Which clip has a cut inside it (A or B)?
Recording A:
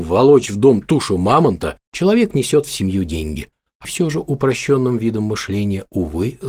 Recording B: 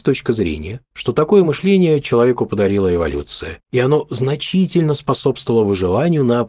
A